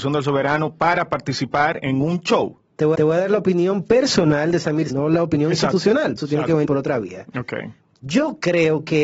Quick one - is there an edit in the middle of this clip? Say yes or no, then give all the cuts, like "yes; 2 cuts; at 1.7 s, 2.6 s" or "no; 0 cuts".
yes; 5 cuts; at 2.6 s, 2.9 s, 4.9 s, 6.2 s, 6.6 s